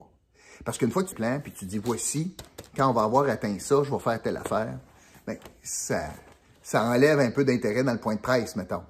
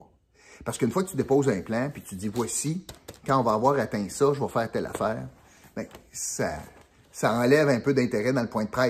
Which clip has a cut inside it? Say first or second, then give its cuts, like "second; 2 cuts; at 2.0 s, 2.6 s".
first; 1 cut; at 1.1 s